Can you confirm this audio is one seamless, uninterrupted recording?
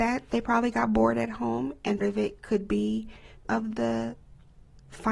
no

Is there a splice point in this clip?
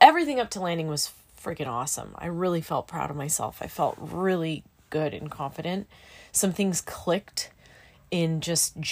no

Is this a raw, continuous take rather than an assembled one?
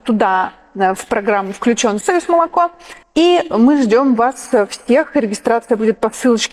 no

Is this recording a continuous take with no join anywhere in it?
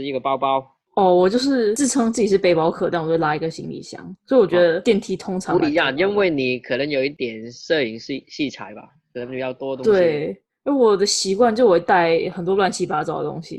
yes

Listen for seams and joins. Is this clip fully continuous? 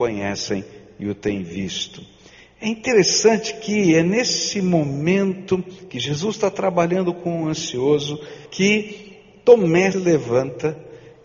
no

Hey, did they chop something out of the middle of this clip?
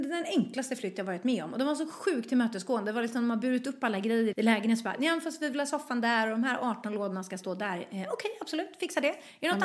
yes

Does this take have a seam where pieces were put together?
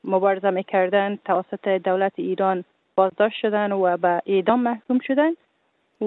no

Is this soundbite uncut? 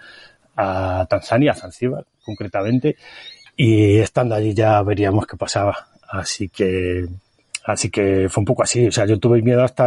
yes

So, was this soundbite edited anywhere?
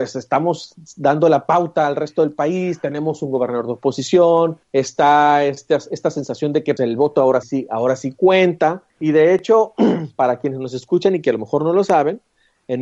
yes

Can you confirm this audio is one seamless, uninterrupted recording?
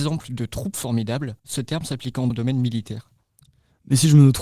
no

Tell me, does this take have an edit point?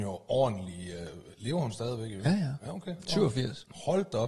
no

